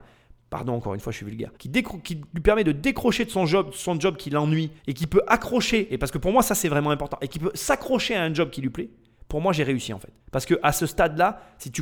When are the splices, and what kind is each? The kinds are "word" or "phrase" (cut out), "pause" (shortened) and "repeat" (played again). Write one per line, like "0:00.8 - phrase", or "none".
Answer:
0:01.6 - pause
0:04.8 - pause
0:10.2 - pause